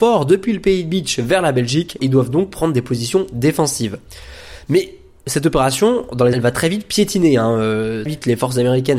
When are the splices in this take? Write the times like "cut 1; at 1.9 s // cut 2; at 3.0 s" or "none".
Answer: cut 1; at 2.0 s // cut 2; at 6.3 s // cut 3; at 8.1 s